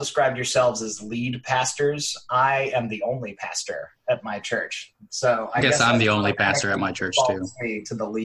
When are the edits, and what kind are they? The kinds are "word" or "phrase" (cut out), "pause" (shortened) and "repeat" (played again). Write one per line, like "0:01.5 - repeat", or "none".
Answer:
none